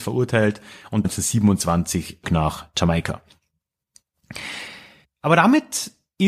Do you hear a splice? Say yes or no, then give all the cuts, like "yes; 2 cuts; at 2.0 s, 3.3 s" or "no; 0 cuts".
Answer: yes; 3 cuts; at 1.0 s, 2.2 s, 5.0 s